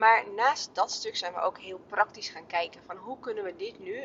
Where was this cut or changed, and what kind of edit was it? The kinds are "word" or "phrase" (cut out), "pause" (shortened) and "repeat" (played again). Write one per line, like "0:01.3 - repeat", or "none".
none